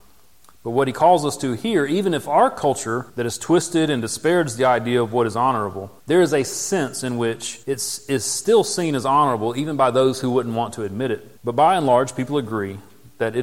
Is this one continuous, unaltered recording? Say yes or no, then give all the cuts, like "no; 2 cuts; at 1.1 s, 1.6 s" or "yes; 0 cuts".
no; 4 cuts; at 3.1 s, 6.0 s, 7.6 s, 11.4 s